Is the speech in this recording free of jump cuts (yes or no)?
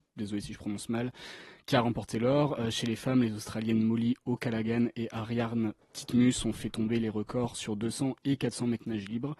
yes